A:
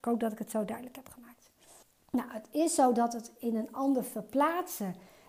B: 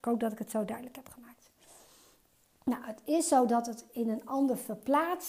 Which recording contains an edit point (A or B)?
A